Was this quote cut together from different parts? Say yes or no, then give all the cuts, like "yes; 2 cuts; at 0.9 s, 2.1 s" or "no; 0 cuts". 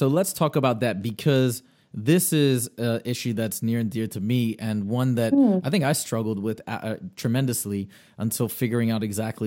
no; 0 cuts